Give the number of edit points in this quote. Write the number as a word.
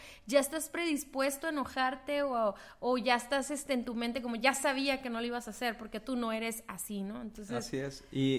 zero